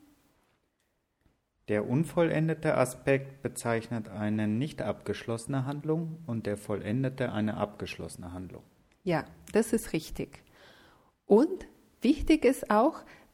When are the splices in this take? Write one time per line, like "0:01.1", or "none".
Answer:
none